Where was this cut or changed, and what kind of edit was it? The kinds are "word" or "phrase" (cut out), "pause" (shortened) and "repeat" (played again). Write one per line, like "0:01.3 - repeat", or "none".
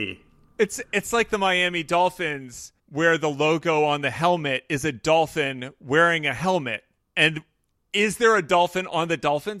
0:02.8 - pause
0:07.0 - pause